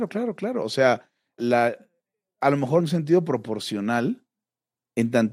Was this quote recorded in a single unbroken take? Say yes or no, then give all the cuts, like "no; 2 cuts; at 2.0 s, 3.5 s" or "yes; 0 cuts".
no; 2 cuts; at 1.4 s, 2.8 s